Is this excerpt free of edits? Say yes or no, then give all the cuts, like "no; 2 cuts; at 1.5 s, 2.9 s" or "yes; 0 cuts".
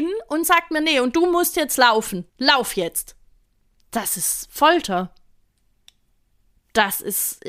no; 2 cuts; at 2.3 s, 3.3 s